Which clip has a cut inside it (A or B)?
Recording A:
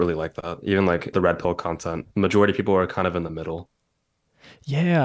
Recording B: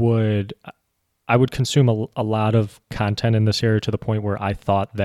A